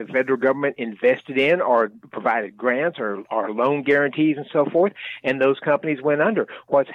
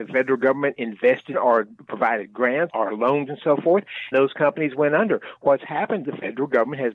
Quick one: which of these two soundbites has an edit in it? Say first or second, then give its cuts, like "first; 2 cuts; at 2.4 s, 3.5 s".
second; 5 cuts; at 1.3 s, 2.7 s, 3.3 s, 4.1 s, 6.0 s